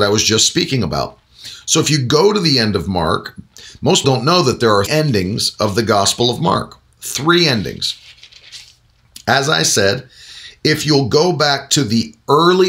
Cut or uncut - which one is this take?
cut